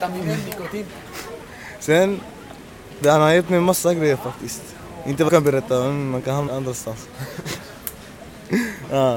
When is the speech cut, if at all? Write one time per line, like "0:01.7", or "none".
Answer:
0:03.0
0:05.3
0:06.5